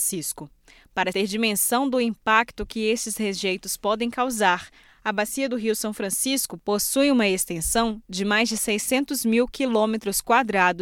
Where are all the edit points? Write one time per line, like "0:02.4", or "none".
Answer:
0:01.1